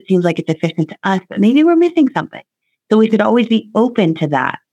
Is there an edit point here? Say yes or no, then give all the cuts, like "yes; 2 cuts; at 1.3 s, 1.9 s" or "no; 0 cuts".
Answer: no; 0 cuts